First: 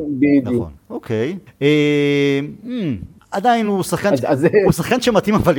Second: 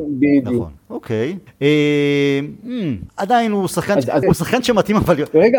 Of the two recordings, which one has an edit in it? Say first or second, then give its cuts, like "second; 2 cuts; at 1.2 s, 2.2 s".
second; 2 cuts; at 3.1 s, 4.2 s